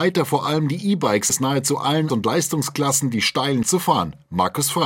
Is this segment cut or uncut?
cut